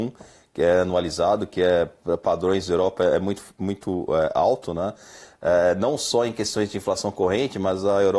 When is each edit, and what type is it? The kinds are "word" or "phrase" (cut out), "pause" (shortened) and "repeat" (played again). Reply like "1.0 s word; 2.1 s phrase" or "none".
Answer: none